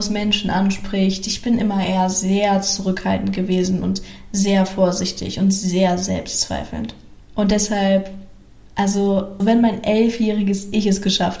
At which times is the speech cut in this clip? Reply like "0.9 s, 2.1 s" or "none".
9.4 s

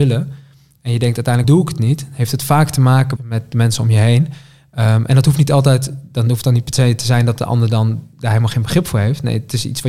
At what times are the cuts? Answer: 1.4 s, 3.2 s

